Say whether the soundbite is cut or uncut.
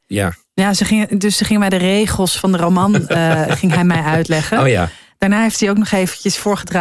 uncut